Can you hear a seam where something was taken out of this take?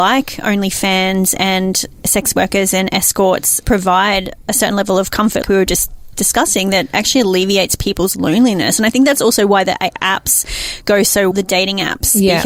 yes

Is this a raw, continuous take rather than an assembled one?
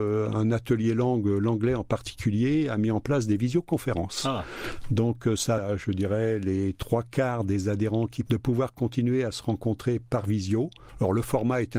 no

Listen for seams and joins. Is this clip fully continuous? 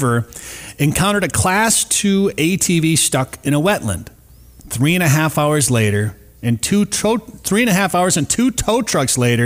yes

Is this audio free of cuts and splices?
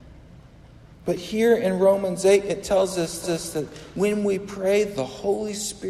no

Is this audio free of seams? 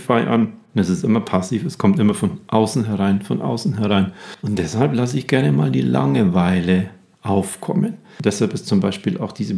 yes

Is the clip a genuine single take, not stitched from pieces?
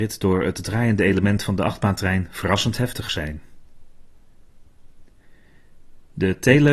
yes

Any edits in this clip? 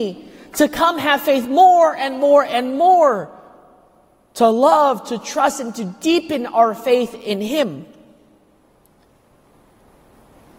no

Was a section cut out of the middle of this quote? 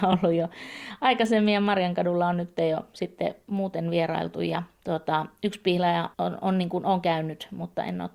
yes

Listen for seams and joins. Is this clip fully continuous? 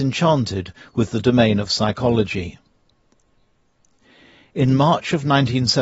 yes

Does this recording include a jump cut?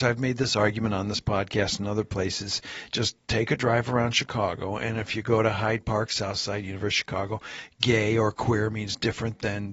no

